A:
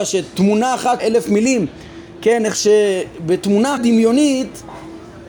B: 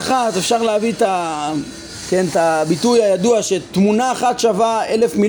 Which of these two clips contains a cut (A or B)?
A